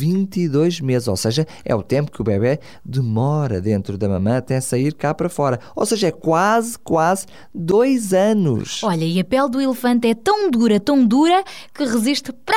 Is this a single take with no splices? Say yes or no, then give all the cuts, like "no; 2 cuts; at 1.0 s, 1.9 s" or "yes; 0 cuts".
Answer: yes; 0 cuts